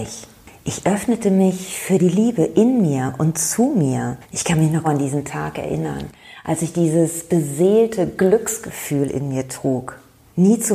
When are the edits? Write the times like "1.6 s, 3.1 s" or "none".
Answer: 4.2 s, 4.8 s